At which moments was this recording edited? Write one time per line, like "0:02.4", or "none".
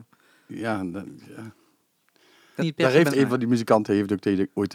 0:02.6
0:03.1